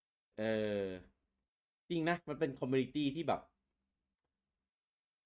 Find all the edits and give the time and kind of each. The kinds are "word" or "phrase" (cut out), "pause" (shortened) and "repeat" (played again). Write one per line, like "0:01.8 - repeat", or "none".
none